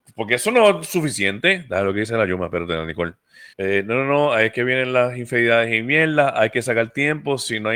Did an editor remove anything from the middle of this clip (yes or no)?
yes